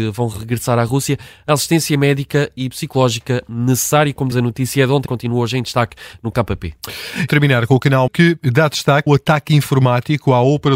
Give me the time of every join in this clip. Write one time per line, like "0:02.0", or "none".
0:04.3
0:05.1
0:06.3
0:07.3
0:08.1
0:09.1